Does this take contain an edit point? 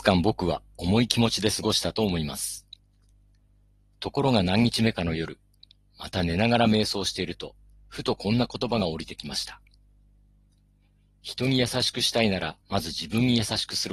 yes; 1 cut; at 12.6 s

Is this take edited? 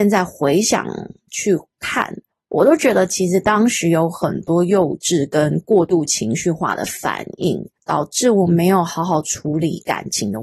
yes; 2 cuts; at 2.3 s, 7.8 s

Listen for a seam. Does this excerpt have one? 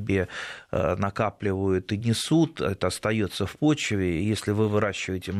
no; 0 cuts

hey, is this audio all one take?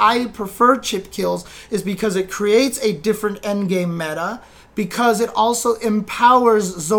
yes; 0 cuts

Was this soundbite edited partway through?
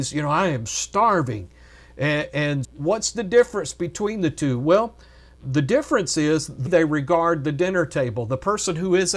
yes; 3 cuts; at 2.6 s, 5.3 s, 6.7 s

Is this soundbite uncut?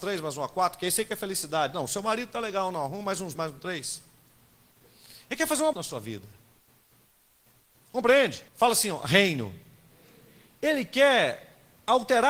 no; 3 cuts; at 3.3 s, 5.7 s, 8.5 s

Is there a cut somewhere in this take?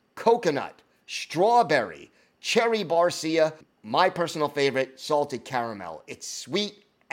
yes; 1 cut; at 3.6 s

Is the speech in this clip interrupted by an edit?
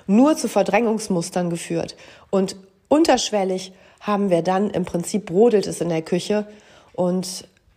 no; 0 cuts

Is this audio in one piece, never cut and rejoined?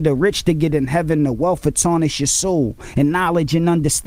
yes; 0 cuts

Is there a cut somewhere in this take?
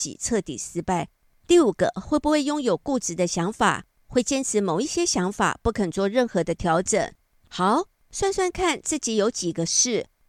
no; 0 cuts

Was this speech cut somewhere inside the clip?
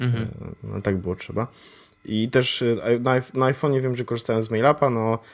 no; 0 cuts

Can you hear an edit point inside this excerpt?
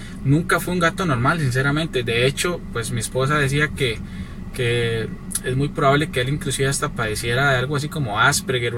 no; 0 cuts

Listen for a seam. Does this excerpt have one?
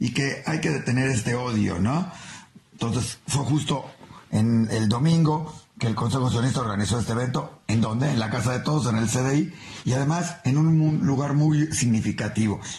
no; 0 cuts

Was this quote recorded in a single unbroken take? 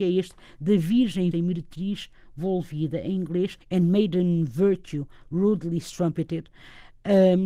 no; 2 cuts; at 1.3 s, 3.6 s

